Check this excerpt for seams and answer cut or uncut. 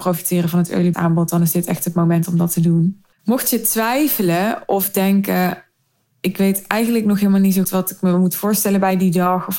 cut